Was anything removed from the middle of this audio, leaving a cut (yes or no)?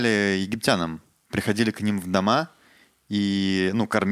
no